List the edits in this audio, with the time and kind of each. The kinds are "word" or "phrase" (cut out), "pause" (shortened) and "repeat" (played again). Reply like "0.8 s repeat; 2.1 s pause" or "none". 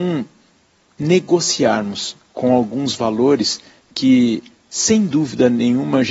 none